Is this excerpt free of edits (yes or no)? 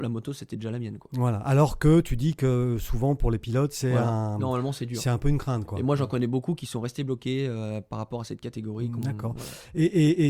yes